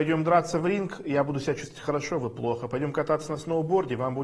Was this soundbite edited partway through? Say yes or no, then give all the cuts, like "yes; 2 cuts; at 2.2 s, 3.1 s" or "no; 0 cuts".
no; 0 cuts